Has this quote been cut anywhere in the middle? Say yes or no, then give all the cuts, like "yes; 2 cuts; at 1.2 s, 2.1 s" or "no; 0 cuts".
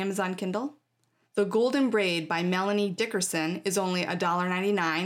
no; 0 cuts